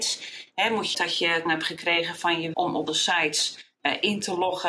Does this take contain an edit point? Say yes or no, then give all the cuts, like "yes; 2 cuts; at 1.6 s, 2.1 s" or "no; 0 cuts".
yes; 4 cuts; at 0.9 s, 1.5 s, 2.5 s, 2.9 s